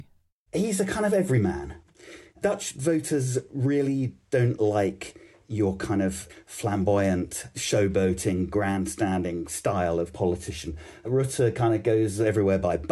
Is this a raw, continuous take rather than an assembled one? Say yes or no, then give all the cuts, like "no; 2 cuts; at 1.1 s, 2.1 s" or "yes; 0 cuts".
yes; 0 cuts